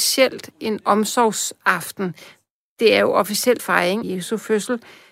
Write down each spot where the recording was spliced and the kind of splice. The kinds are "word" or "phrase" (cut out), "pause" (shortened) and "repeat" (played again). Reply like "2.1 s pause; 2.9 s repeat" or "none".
3.6 s word; 4.0 s word